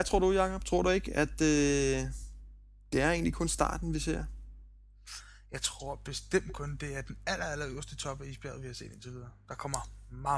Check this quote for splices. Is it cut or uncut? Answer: uncut